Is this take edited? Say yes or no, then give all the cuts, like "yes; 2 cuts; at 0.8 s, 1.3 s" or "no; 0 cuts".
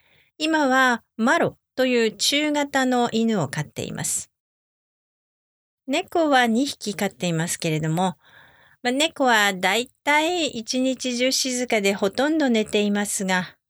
no; 0 cuts